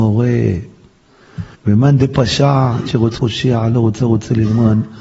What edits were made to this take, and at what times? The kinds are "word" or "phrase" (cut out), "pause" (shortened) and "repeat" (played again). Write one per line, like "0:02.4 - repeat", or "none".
0:01.5 - pause
0:02.9 - word
0:03.2 - word
0:04.0 - repeat